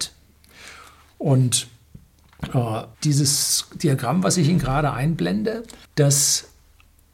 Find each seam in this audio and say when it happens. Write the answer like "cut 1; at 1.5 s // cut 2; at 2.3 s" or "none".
cut 1; at 2.9 s // cut 2; at 5.9 s